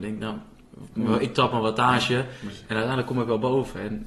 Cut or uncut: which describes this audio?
uncut